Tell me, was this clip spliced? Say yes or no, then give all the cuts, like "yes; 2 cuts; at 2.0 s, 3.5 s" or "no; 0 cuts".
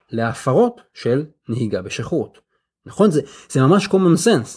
no; 0 cuts